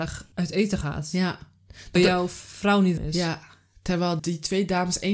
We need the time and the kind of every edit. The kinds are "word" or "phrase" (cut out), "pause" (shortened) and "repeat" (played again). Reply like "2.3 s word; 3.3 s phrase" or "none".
2.0 s word; 3.0 s word; 4.2 s word